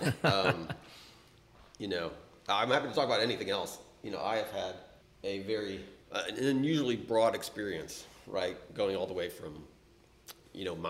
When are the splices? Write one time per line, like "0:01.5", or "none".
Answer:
0:05.0
0:06.0